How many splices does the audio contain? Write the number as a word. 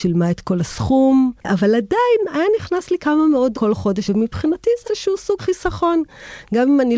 five